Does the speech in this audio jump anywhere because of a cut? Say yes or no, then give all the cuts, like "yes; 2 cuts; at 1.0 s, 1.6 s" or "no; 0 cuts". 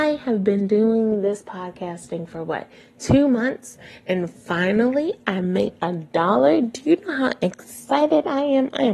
no; 0 cuts